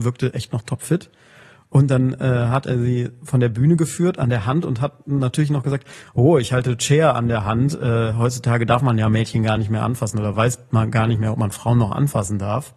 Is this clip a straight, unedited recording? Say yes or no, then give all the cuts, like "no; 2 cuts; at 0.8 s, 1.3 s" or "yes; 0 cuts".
yes; 0 cuts